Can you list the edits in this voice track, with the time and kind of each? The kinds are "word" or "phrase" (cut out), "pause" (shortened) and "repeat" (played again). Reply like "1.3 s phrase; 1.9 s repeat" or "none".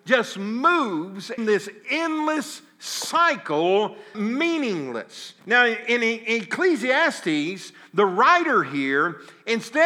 1.4 s word; 4.1 s word; 5.4 s pause